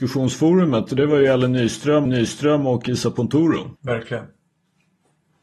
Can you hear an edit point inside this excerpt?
yes; 2 cuts; at 2.1 s, 3.8 s

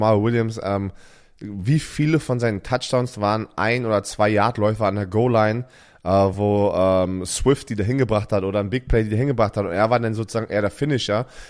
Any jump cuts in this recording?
no; 0 cuts

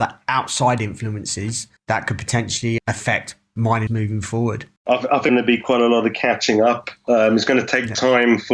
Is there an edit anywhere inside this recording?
yes; 5 cuts; at 1.8 s, 2.8 s, 3.9 s, 4.8 s, 5.3 s

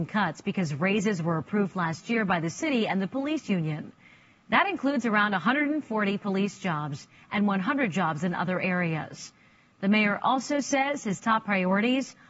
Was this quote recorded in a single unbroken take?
yes; 0 cuts

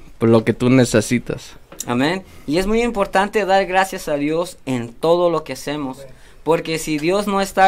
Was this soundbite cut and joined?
no; 0 cuts

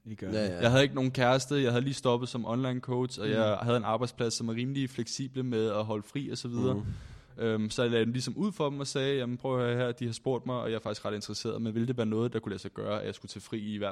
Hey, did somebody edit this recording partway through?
no; 0 cuts

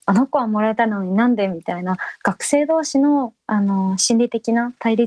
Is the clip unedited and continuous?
yes; 0 cuts

